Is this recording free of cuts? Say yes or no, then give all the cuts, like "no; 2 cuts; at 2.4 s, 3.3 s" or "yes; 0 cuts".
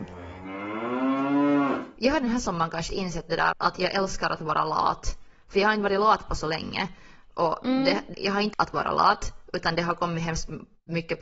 no; 4 cuts; at 2.9 s, 3.5 s, 8.1 s, 8.5 s